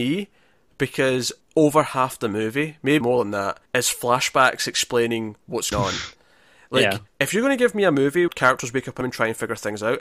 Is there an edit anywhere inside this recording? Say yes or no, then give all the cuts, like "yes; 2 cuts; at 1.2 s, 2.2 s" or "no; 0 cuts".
yes; 7 cuts; at 1.4 s, 3.0 s, 3.7 s, 5.7 s, 7.1 s, 8.3 s, 9.0 s